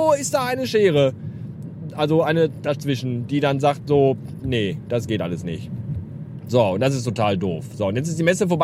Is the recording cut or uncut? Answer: uncut